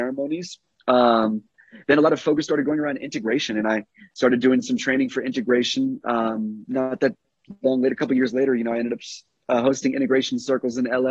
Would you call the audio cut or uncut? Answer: uncut